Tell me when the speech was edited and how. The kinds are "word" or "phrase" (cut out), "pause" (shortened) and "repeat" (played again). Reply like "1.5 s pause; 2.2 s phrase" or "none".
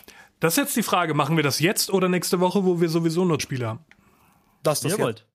3.4 s word